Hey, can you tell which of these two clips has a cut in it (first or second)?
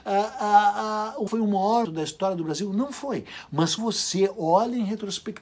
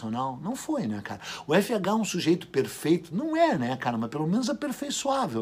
first